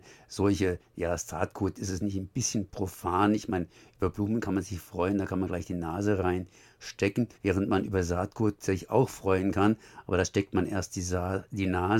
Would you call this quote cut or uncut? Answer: cut